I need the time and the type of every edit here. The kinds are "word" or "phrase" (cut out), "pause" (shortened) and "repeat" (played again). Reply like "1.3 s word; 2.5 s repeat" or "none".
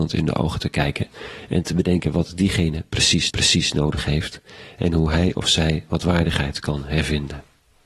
3.3 s repeat